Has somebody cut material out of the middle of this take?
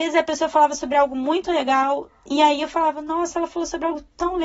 no; 0 cuts

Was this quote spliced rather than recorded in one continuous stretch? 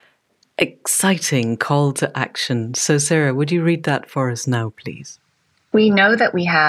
no; 0 cuts

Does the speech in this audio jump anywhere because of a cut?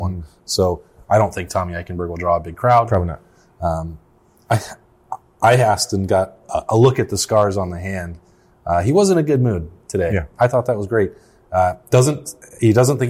no; 0 cuts

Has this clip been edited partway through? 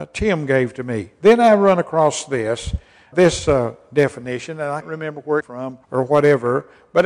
yes; 4 cuts; at 3.1 s, 4.8 s, 5.4 s, 5.8 s

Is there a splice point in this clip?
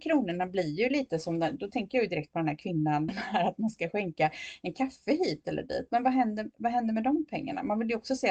yes; 1 cut; at 3.1 s

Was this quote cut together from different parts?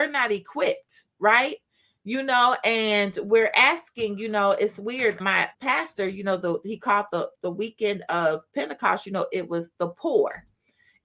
yes; 3 cuts; at 5.2 s, 5.5 s, 7.3 s

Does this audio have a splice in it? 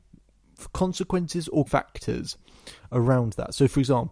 yes; 1 cut; at 1.7 s

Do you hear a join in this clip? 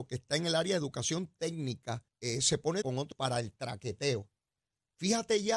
yes; 3 cuts; at 2.1 s, 2.8 s, 3.1 s

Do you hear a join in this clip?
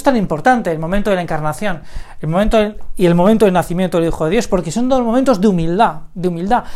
no; 0 cuts

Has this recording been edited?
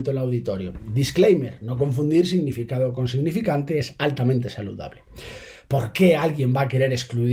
no; 0 cuts

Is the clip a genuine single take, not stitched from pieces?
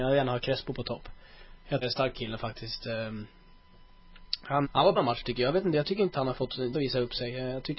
no; 6 cuts; at 1.8 s, 2.1 s, 4.6 s, 4.9 s, 6.1 s, 6.7 s

